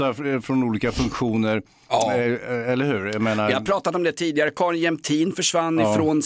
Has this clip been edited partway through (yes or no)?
no